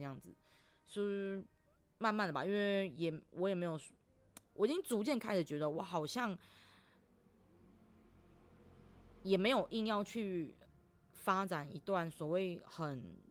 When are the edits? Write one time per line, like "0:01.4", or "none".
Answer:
none